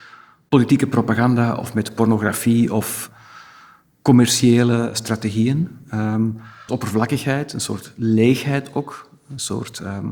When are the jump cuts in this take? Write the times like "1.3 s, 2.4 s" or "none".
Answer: 6.7 s

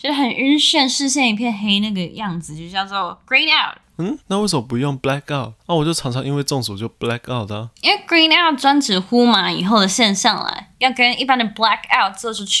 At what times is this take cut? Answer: 4.2 s, 5.6 s, 7.8 s

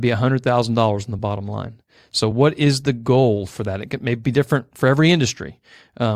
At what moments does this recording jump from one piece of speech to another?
none

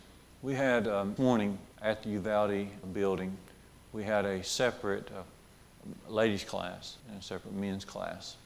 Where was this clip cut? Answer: 1.2 s, 1.7 s, 2.8 s, 7.0 s

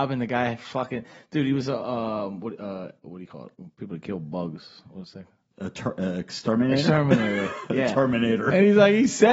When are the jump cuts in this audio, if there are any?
none

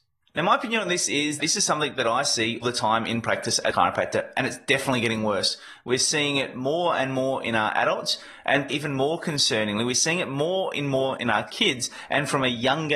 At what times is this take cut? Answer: 1.4 s, 2.6 s, 3.7 s, 8.7 s

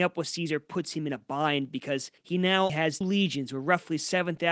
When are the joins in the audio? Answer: 2.2 s, 2.7 s, 3.0 s

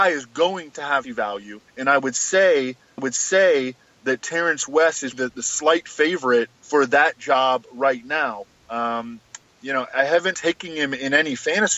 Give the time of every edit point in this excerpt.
1.0 s, 1.7 s, 3.0 s, 5.1 s, 6.5 s, 8.6 s, 9.9 s, 10.3 s

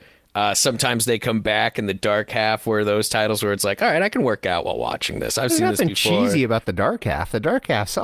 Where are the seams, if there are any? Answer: none

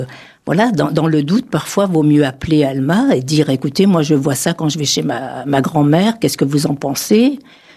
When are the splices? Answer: none

